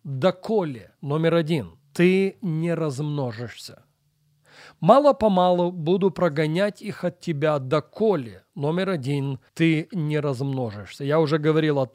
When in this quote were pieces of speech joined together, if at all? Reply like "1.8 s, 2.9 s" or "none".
1.0 s, 1.8 s, 9.5 s